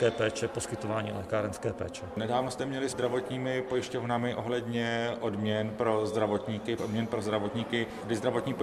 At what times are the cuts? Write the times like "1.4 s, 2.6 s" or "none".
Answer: 2.9 s, 6.8 s

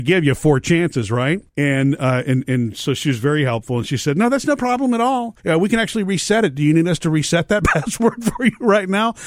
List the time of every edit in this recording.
1.5 s, 5.4 s

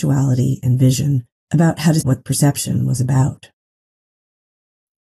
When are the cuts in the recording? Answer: 1.4 s, 2.0 s

